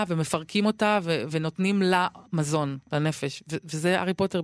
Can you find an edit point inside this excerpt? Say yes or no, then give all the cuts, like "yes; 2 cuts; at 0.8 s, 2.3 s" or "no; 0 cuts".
yes; 2 cuts; at 1.3 s, 2.2 s